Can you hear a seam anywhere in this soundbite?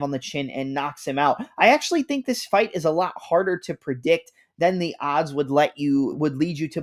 no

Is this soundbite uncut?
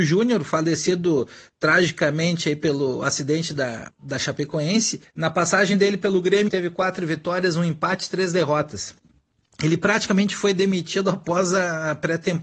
no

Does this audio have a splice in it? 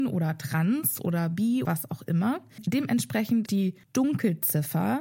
yes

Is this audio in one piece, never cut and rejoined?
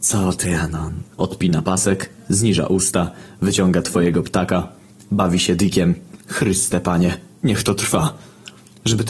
no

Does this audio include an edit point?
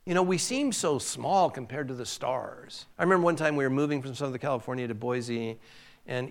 yes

